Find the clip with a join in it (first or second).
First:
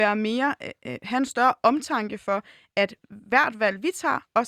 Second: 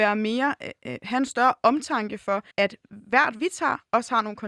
second